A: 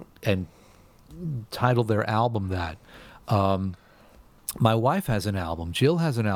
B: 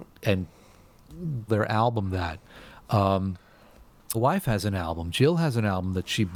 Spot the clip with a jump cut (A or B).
B